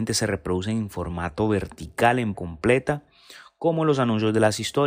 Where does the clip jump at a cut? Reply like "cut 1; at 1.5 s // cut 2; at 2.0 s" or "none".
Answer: cut 1; at 2.3 s